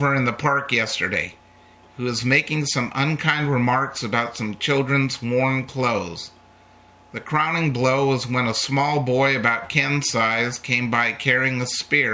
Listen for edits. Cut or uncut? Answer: uncut